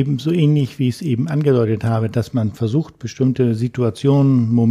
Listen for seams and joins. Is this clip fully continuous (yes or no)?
yes